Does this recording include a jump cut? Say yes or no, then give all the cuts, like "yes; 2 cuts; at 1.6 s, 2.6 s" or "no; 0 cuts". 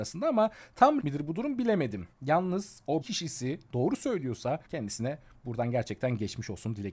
yes; 4 cuts; at 1.0 s, 2.1 s, 3.0 s, 4.7 s